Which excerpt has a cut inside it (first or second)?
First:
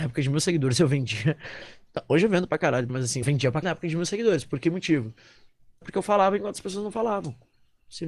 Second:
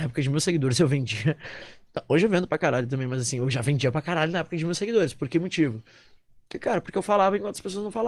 first